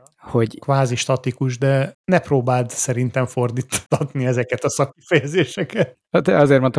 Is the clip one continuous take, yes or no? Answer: yes